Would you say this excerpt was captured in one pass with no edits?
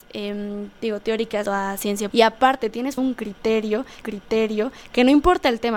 no; 4 cuts; at 1.5 s, 2.1 s, 3.0 s, 4.0 s

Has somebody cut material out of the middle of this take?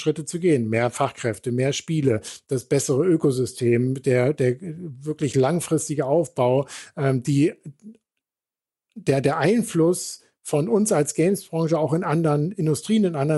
no; 0 cuts

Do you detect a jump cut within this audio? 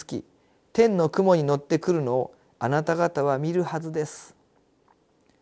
no; 0 cuts

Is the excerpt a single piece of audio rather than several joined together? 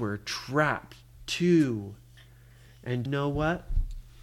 no; 1 cut; at 3.1 s

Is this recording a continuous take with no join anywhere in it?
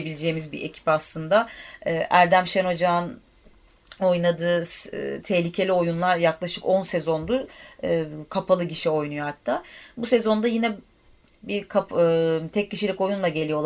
yes; 0 cuts

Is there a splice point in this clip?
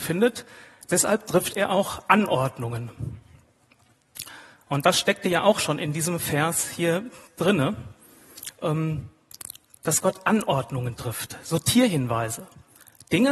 no; 0 cuts

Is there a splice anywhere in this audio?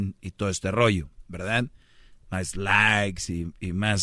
no; 0 cuts

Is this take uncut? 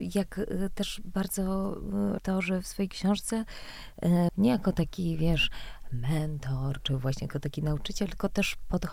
no; 2 cuts; at 2.2 s, 4.3 s

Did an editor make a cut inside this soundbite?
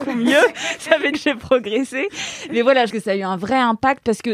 yes; 2 cuts; at 1.1 s, 2.9 s

